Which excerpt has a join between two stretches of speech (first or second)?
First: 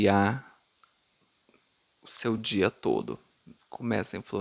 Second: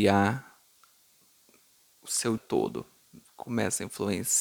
second